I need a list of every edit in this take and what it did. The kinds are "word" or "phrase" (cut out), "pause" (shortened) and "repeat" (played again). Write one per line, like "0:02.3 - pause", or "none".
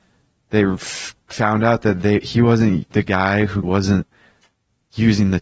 0:03.6 - word